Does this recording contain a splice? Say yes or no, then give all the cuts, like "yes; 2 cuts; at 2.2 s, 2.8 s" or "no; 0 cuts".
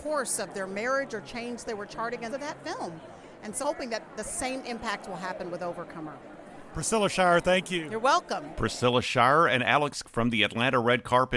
yes; 4 cuts; at 1.6 s, 2.3 s, 3.6 s, 10.0 s